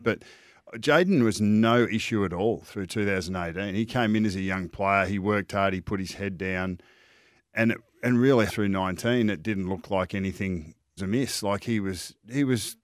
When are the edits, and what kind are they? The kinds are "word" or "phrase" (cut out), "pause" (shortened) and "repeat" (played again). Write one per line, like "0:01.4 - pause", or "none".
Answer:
0:08.5 - word
0:11.0 - word